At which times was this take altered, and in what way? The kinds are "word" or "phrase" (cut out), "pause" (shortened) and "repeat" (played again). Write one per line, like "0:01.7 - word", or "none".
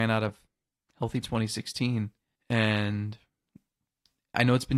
0:01.2 - phrase
0:02.4 - pause